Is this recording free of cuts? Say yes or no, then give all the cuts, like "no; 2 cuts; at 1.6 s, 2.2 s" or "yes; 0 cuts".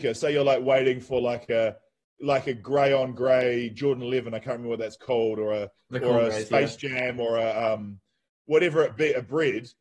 yes; 0 cuts